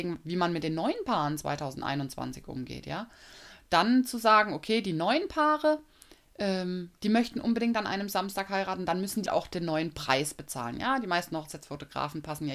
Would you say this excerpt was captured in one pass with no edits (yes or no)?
no